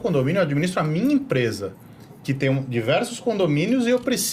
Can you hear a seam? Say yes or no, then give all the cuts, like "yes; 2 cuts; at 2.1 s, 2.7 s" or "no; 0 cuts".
no; 0 cuts